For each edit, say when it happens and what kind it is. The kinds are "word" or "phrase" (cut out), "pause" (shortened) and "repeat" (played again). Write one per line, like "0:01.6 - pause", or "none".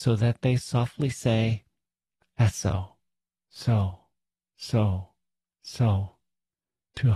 none